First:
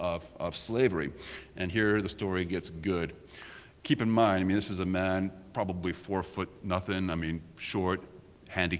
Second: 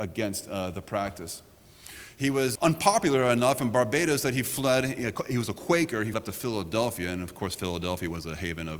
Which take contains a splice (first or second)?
second